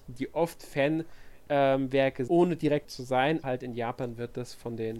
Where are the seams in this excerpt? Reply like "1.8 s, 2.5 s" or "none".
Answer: 2.3 s, 2.8 s, 3.4 s